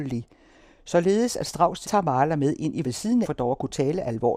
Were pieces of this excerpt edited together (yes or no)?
yes